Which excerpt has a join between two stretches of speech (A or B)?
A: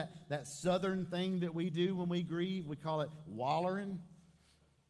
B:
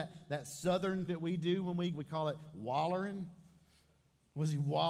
B